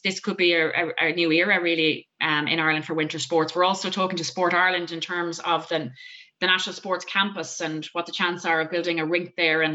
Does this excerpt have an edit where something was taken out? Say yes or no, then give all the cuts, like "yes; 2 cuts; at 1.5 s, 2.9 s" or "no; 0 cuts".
no; 0 cuts